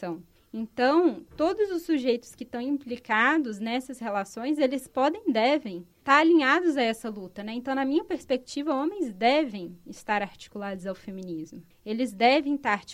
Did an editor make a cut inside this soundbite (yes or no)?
yes